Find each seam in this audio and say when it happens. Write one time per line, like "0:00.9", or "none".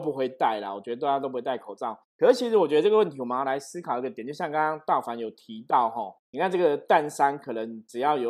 0:02.1
0:06.2